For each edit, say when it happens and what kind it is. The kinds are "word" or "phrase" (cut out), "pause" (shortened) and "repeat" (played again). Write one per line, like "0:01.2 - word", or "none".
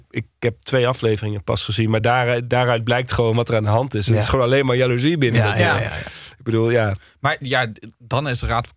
none